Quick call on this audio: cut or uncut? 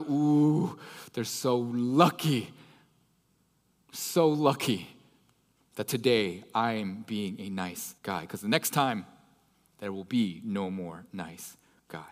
cut